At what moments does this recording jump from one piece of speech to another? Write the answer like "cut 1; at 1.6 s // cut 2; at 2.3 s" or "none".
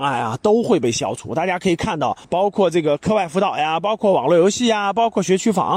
cut 1; at 2.2 s